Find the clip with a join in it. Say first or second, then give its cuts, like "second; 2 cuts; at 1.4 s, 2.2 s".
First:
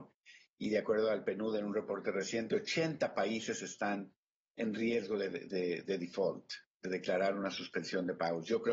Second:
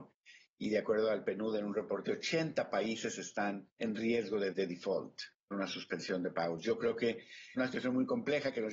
second; 5 cuts; at 2.0 s, 3.7 s, 4.5 s, 5.5 s, 7.6 s